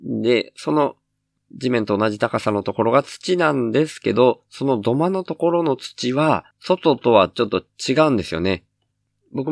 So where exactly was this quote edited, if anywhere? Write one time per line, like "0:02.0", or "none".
0:06.5